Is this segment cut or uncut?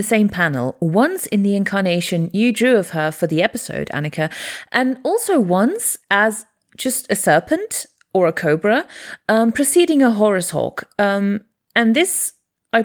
uncut